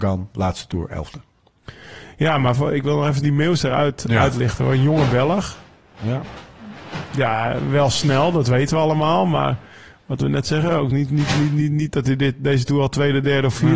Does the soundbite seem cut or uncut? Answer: uncut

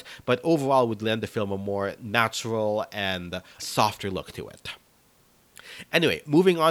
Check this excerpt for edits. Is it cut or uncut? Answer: cut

